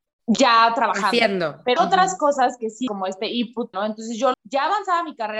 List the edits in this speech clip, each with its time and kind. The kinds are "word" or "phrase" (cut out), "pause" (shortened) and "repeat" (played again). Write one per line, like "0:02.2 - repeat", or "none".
0:01.8 - word
0:02.9 - word
0:03.7 - word
0:04.3 - phrase